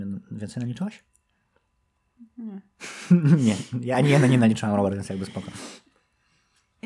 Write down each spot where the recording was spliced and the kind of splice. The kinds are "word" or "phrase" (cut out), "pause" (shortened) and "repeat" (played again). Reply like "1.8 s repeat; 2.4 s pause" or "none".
none

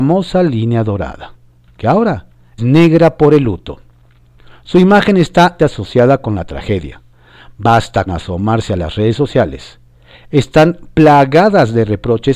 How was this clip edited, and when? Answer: 2.6 s word; 5.6 s word; 8.1 s word

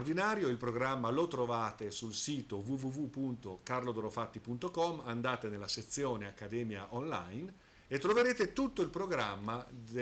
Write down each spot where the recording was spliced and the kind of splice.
none

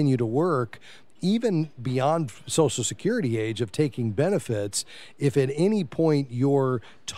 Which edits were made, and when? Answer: none

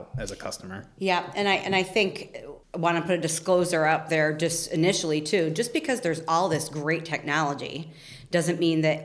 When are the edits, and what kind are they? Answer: 2.6 s pause

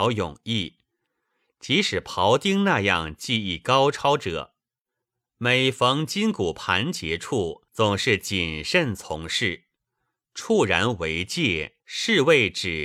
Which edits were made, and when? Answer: 7.7 s pause; 11.8 s pause

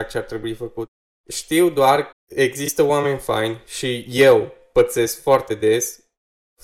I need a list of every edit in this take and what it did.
2.1 s word

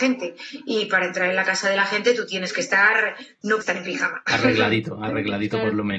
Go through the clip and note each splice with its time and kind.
3.6 s word

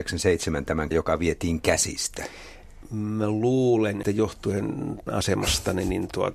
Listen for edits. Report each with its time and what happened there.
0.9 s word; 4.0 s word; 5.1 s word

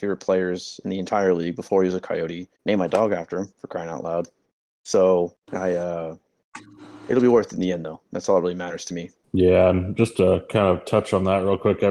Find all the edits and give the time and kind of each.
2.6 s pause

